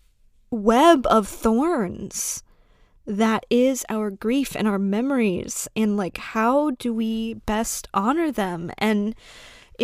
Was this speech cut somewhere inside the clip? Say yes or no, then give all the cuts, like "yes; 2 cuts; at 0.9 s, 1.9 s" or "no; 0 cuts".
no; 0 cuts